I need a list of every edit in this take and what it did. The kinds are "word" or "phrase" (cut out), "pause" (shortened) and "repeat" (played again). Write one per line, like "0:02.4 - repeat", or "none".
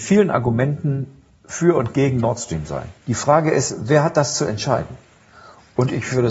0:03.0 - pause